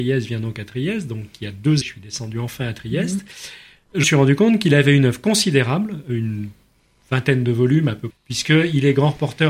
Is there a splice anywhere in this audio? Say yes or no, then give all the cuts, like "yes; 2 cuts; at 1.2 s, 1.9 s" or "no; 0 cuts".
yes; 3 cuts; at 1.8 s, 4.0 s, 8.1 s